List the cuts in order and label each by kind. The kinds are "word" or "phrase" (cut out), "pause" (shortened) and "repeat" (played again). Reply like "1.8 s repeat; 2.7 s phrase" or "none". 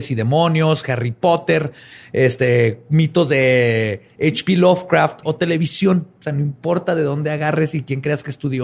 5.2 s phrase